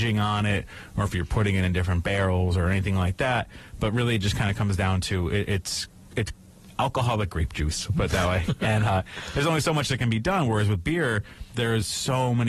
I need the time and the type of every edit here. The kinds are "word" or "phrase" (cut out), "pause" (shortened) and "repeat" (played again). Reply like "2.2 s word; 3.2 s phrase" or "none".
none